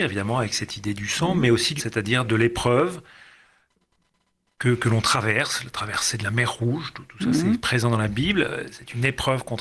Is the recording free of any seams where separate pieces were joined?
no; 1 cut; at 1.8 s

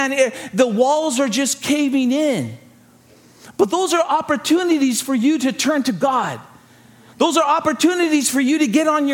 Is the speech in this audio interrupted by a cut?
no; 0 cuts

